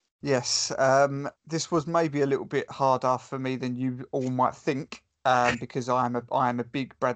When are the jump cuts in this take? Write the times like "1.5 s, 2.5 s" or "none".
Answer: 1.4 s